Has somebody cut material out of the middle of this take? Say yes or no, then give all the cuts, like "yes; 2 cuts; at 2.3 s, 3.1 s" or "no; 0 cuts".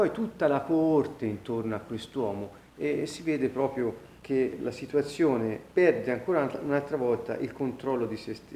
yes; 2 cuts; at 4.2 s, 5.7 s